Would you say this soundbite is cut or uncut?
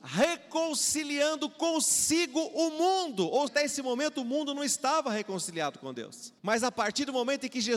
cut